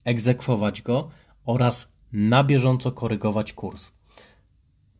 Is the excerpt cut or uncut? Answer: cut